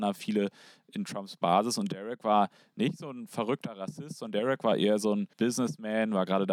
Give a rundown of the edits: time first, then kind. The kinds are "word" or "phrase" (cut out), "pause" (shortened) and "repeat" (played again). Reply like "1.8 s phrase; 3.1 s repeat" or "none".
5.3 s pause